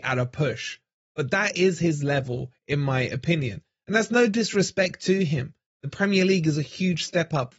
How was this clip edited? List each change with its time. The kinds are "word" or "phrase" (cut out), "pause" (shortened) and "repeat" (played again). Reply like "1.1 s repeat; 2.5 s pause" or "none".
none